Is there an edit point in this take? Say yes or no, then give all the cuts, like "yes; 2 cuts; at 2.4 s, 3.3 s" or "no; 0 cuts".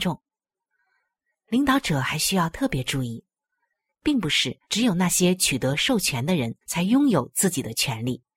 yes; 2 cuts; at 4.6 s, 6.6 s